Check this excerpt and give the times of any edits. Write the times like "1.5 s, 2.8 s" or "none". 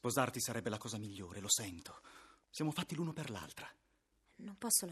none